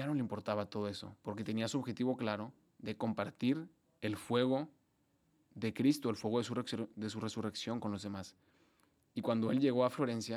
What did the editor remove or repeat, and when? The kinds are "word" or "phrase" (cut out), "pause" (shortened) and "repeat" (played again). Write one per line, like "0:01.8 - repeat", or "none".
none